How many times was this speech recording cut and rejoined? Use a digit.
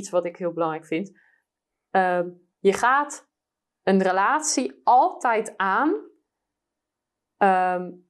0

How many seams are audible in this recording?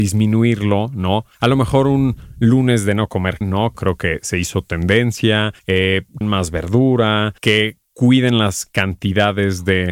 6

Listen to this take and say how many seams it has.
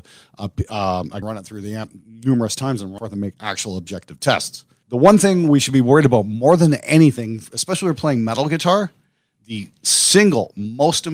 3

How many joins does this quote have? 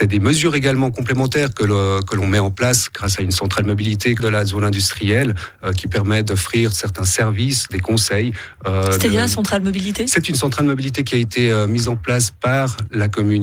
1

